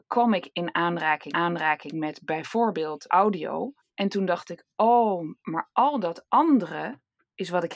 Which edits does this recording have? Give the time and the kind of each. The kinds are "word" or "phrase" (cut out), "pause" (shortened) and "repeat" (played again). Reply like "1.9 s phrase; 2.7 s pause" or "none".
1.3 s repeat; 3.1 s word; 3.8 s pause; 5.4 s pause